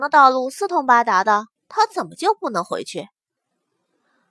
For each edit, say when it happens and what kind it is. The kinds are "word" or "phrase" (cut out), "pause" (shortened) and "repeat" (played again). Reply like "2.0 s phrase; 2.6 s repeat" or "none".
1.6 s pause